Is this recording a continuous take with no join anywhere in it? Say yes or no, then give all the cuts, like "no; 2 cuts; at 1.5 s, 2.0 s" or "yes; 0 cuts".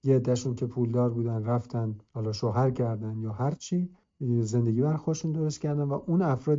no; 2 cuts; at 2.1 s, 4.0 s